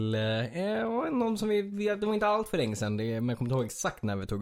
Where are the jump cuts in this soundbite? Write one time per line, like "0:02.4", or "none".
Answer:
none

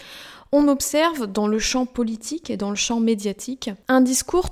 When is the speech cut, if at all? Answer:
none

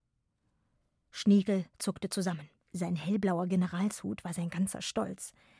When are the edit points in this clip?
0:02.6

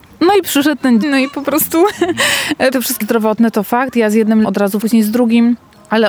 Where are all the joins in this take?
0:01.0
0:02.7
0:03.0
0:04.4
0:04.8

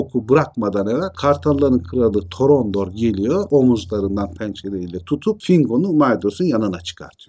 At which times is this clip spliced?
none

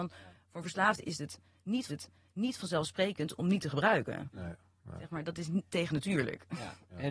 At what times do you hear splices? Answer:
0:01.9

